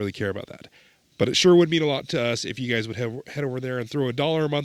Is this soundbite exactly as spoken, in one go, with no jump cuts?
yes; 0 cuts

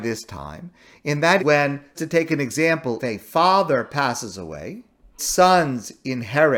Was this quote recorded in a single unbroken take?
no; 4 cuts; at 1.4 s, 1.9 s, 3.0 s, 5.2 s

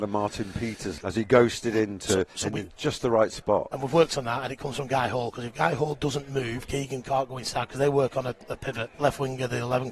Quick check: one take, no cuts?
no; 1 cut; at 8.9 s

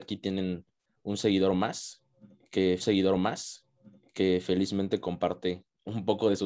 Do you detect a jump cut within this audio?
yes; 1 cut; at 2.8 s

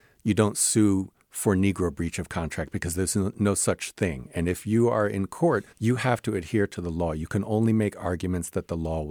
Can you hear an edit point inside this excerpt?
yes; 1 cut; at 5.7 s

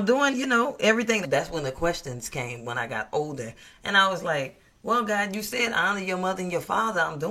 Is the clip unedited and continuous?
no; 1 cut; at 1.2 s

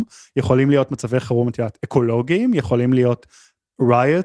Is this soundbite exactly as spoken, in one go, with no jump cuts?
yes; 0 cuts

